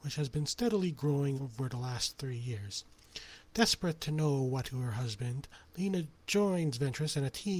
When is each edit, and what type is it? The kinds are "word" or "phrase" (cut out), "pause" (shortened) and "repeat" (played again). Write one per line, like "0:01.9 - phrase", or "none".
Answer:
0:01.4 - word
0:04.6 - word
0:06.2 - pause